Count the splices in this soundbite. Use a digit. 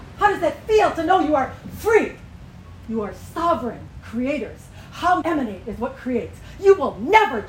1